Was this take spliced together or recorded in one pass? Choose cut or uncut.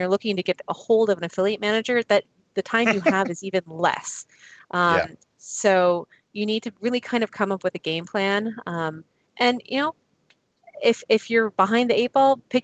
cut